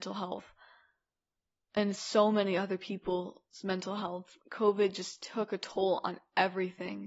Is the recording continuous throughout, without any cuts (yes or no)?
no